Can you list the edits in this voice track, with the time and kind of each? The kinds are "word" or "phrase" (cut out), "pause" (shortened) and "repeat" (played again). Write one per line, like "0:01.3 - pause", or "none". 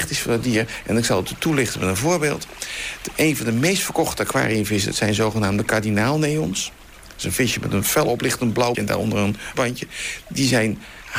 0:08.7 - word
0:09.5 - word